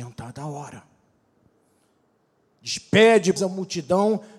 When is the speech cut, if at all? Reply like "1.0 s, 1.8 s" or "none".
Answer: 3.4 s